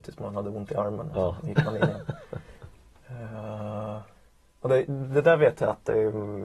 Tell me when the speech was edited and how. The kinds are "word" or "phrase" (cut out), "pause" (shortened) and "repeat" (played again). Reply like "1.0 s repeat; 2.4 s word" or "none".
none